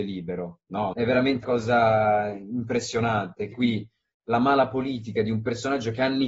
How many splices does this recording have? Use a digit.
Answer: 3